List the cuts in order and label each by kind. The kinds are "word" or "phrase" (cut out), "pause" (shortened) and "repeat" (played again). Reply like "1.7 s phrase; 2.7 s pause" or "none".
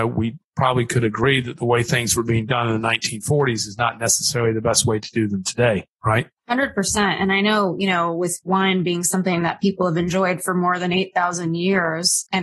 6.4 s pause